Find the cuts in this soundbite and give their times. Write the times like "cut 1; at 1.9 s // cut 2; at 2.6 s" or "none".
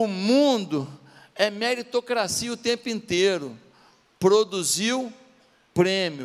none